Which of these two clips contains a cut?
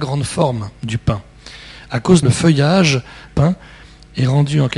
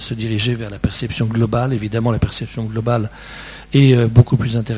first; 2 cuts; at 2.2 s, 3.3 s

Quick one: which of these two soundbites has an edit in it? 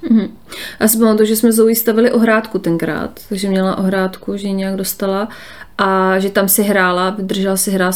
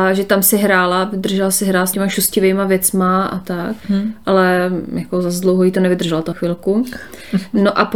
second; 3 cuts; at 1.9 s, 3.8 s, 6.3 s

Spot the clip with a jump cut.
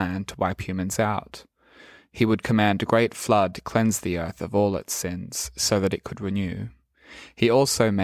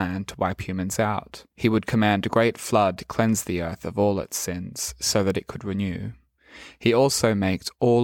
second; 1 cut; at 1.5 s

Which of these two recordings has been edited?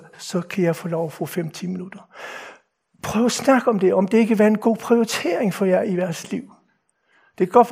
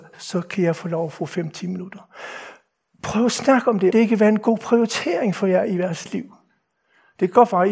second; 1 cut; at 3.9 s

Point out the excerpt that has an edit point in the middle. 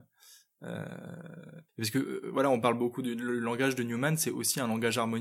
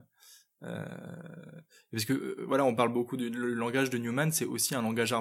first; 1 cut; at 1.7 s

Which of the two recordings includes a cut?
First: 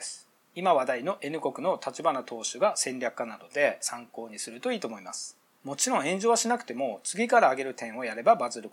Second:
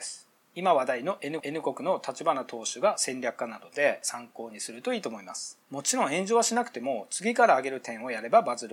second; 2 cuts; at 1.4 s, 5.6 s

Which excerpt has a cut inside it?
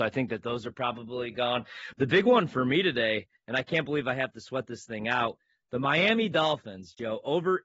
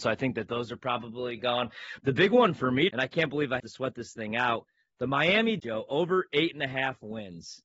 second; 3 cuts; at 2.9 s, 3.6 s, 5.6 s

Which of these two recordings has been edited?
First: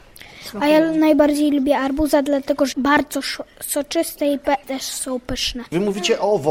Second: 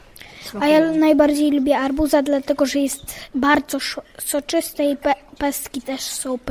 first; 2 cuts; at 2.7 s, 4.6 s

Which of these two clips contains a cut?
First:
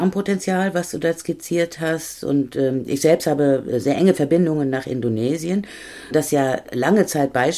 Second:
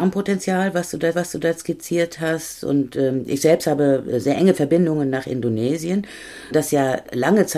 second; 1 cut; at 1.1 s

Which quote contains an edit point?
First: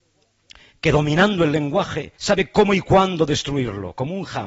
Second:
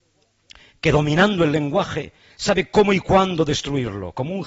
first; 1 cut; at 2.2 s

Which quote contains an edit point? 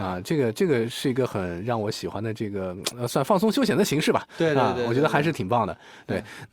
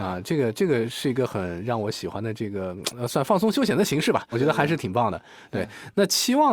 second; 1 cut; at 4.3 s

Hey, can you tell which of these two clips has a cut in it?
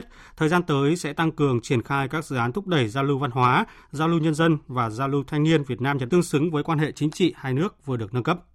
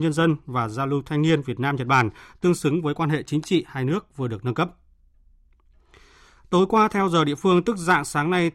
first; 1 cut; at 6.1 s

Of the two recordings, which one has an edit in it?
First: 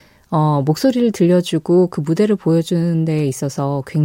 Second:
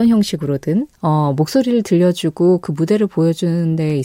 second; 1 cut; at 0.9 s

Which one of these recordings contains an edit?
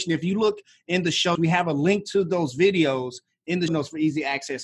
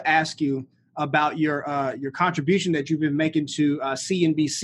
first; 2 cuts; at 1.3 s, 3.7 s

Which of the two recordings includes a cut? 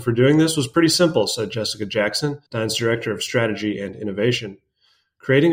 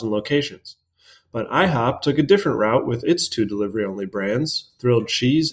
first; 1 cut; at 2.5 s

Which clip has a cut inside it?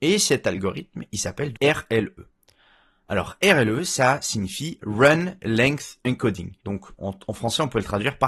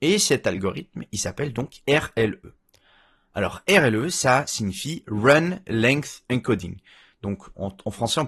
first; 2 cuts; at 1.5 s, 6.6 s

